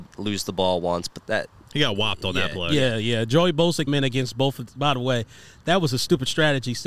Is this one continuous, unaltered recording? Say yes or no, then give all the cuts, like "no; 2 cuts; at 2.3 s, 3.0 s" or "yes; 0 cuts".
no; 3 cuts; at 1.2 s, 3.9 s, 4.8 s